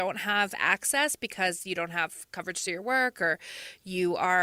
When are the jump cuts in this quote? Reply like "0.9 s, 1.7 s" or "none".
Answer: none